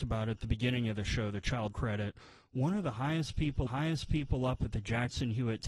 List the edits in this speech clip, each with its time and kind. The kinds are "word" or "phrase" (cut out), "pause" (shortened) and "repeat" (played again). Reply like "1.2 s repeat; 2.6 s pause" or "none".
1.7 s word; 3.7 s repeat